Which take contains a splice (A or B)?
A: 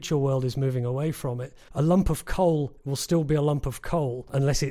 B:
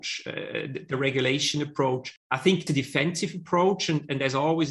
B